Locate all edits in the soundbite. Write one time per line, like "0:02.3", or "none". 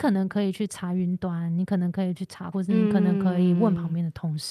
0:02.5